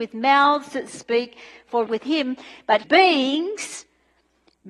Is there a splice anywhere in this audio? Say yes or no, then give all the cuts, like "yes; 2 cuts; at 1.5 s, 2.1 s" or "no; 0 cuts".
yes; 2 cuts; at 1.9 s, 2.8 s